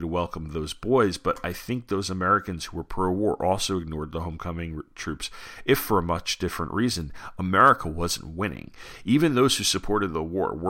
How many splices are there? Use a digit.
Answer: 0